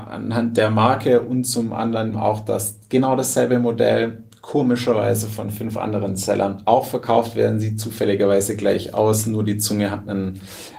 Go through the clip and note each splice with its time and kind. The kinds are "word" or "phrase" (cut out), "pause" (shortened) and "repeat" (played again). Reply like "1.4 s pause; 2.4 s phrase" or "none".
2.1 s word

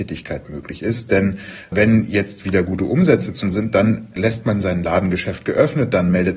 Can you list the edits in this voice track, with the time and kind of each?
3.4 s word

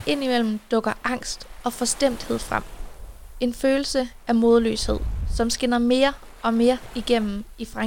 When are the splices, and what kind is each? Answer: none

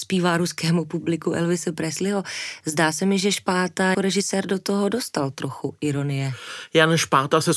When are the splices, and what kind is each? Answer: 3.9 s word

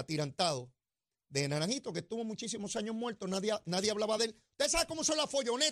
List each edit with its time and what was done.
none

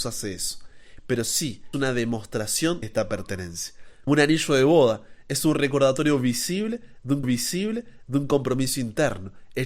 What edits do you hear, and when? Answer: 1.7 s word; 2.8 s word; 4.1 s word; 7.2 s repeat

